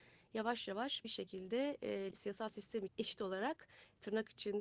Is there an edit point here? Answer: yes; 3 cuts; at 1.0 s, 2.1 s, 2.9 s

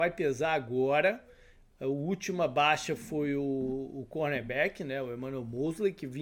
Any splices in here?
no; 0 cuts

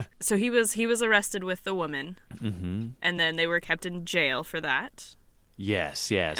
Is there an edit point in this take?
no; 0 cuts

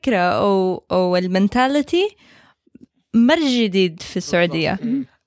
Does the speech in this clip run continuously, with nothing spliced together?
yes; 0 cuts

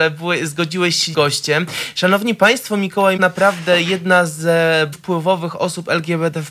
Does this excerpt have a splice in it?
yes; 3 cuts; at 1.1 s, 3.2 s, 4.9 s

